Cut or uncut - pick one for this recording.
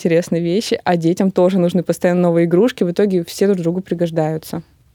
uncut